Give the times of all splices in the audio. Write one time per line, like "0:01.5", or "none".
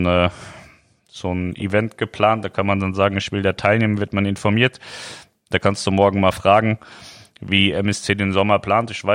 none